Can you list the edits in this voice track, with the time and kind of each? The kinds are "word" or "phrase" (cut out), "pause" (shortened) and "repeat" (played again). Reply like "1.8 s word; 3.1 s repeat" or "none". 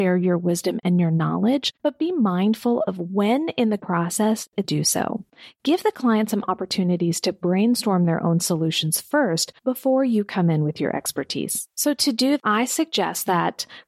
1.8 s pause; 3.8 s word; 4.6 s phrase; 9.6 s pause; 11.7 s pause; 12.4 s word